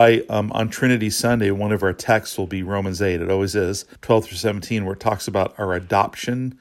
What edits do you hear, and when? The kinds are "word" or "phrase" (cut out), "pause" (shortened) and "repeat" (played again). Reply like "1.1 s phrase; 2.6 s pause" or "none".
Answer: 4.0 s pause